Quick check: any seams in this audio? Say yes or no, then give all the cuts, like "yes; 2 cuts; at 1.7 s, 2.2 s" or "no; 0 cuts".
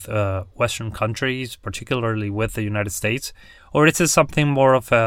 yes; 1 cut; at 3.6 s